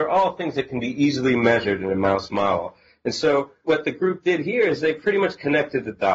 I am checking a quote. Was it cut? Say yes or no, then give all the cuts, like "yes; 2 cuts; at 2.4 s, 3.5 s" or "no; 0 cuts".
no; 0 cuts